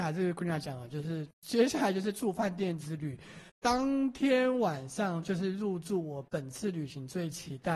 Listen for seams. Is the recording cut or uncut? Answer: cut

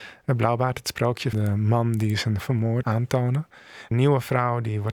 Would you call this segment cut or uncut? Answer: cut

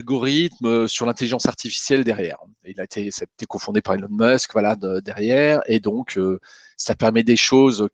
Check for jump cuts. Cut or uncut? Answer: uncut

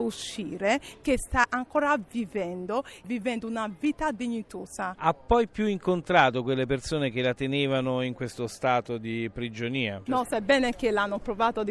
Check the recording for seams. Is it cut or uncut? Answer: uncut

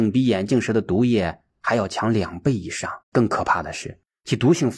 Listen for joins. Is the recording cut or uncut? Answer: cut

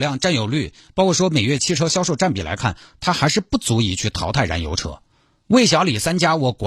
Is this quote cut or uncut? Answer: uncut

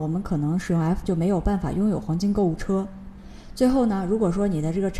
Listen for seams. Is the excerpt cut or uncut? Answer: cut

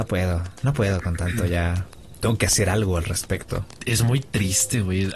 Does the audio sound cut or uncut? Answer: uncut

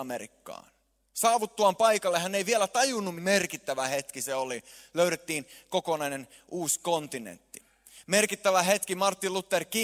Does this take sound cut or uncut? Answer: cut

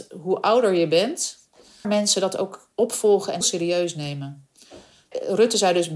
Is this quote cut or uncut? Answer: cut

